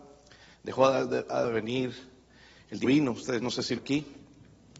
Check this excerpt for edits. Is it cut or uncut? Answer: cut